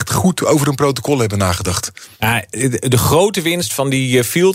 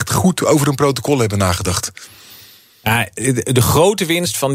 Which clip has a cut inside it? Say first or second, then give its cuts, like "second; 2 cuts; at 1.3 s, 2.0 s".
first; 1 cut; at 2.1 s